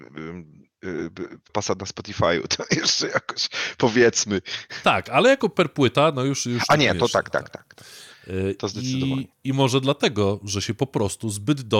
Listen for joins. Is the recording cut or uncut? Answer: cut